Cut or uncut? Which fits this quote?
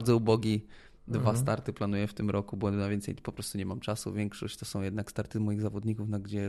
uncut